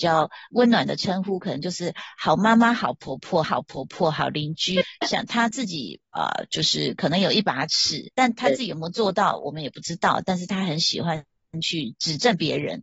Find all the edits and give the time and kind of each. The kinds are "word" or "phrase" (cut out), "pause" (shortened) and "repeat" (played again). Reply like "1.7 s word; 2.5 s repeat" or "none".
3.4 s repeat; 4.8 s phrase; 8.1 s pause